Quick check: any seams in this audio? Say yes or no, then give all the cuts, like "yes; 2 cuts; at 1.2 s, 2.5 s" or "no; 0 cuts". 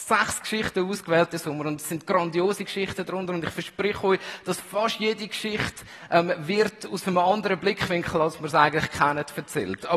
no; 0 cuts